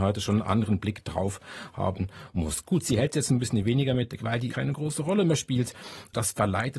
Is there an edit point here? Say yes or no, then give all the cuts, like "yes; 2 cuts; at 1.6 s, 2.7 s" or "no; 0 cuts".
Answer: yes; 2 cuts; at 4.2 s, 4.5 s